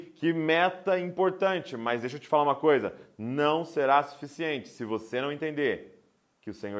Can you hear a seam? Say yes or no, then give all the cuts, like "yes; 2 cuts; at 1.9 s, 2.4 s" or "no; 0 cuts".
no; 0 cuts